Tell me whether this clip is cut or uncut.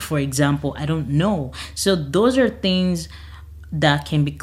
uncut